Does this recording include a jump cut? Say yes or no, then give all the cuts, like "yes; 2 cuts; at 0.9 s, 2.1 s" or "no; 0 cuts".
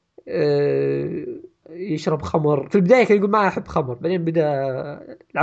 yes; 2 cuts; at 1.6 s, 2.7 s